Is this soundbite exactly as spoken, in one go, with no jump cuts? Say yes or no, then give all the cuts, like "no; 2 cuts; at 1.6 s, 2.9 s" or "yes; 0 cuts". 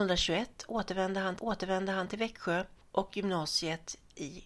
no; 1 cut; at 1.4 s